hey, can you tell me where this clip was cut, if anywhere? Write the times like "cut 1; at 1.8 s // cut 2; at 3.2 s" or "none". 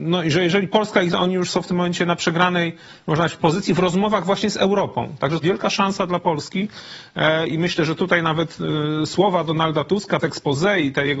cut 1; at 1.1 s // cut 2; at 3.4 s // cut 3; at 5.4 s // cut 4; at 10.2 s